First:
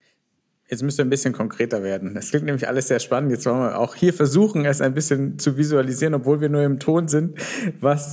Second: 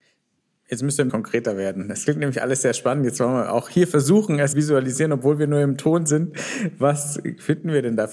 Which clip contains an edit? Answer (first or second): second